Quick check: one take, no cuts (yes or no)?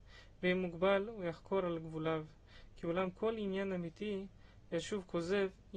yes